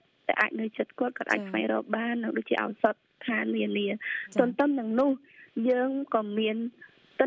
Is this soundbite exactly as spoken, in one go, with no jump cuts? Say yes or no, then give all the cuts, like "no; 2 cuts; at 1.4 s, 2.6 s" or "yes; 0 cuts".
yes; 0 cuts